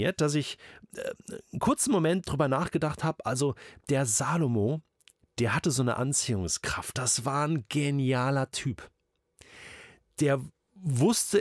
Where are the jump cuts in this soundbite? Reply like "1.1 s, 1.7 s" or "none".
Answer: none